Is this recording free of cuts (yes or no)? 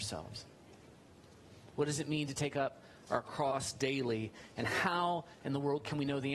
yes